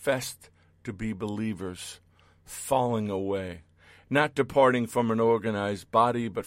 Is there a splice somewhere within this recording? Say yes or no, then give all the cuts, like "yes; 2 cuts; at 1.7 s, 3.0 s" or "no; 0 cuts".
no; 0 cuts